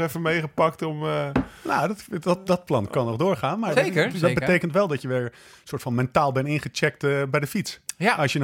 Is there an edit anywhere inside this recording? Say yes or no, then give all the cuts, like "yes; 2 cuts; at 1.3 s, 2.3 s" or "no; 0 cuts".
no; 0 cuts